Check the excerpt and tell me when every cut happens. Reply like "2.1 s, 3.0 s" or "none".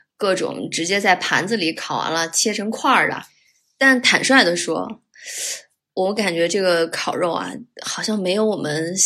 none